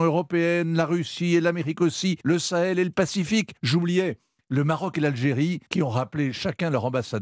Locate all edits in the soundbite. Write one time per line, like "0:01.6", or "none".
0:02.2
0:03.6
0:05.7